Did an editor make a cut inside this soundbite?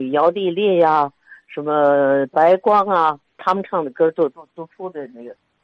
no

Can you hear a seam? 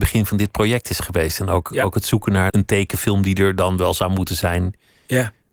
yes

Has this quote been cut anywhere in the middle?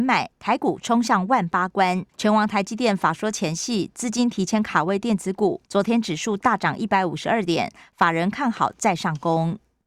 yes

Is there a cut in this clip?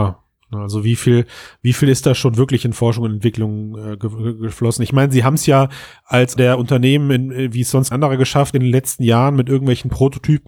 yes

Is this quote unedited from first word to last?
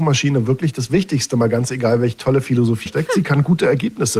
no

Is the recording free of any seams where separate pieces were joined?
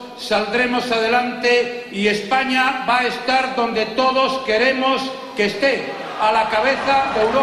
yes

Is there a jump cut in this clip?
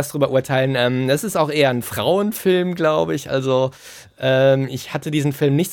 no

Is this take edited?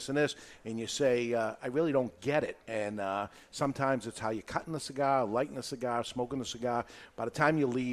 yes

